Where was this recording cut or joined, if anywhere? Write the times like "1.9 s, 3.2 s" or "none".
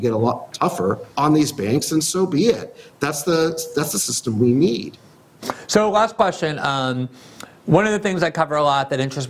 1.1 s